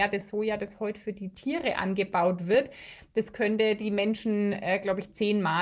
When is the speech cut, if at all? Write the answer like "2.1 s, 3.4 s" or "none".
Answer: none